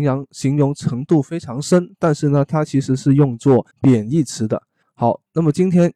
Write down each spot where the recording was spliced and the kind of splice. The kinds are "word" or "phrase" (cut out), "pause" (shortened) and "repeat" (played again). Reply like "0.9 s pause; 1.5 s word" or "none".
3.7 s pause; 4.8 s pause

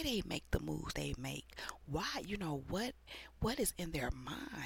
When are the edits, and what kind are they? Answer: 0.9 s word

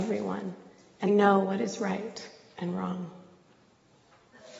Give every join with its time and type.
1.1 s word

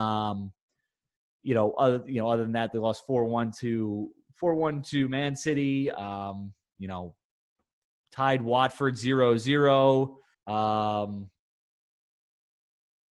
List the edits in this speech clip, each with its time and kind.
10.3 s pause

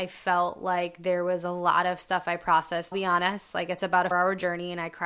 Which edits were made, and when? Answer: 2.9 s word; 4.1 s word

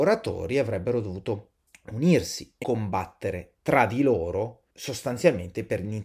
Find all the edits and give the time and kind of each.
1.7 s pause; 2.6 s word; 4.7 s pause

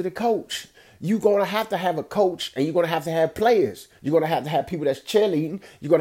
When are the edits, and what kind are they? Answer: 3.9 s pause

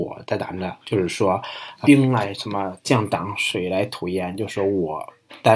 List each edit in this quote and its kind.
1.8 s word

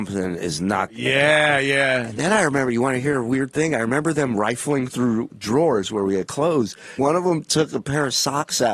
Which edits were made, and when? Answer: 5.3 s word; 7.0 s word

